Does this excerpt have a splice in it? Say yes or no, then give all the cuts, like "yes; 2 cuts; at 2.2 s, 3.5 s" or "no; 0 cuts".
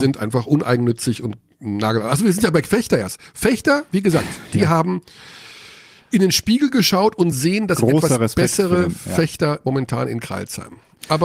no; 0 cuts